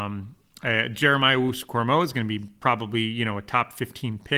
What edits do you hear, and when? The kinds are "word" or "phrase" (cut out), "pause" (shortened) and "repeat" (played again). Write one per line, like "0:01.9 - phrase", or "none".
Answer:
none